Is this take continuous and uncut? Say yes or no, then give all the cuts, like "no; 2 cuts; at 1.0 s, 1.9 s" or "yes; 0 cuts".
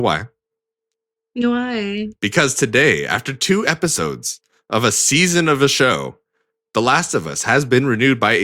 yes; 0 cuts